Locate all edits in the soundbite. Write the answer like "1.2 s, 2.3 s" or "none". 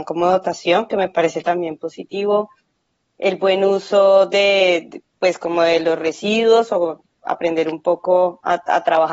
none